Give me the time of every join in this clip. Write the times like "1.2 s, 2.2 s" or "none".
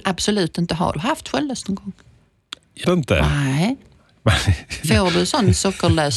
0.9 s, 2.8 s